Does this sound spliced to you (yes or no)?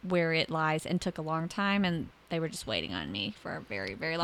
yes